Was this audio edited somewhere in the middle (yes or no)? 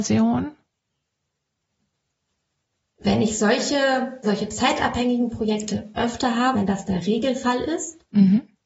yes